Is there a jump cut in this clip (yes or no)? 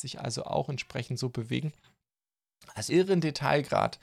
yes